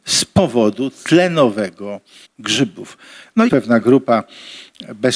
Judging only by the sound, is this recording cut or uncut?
cut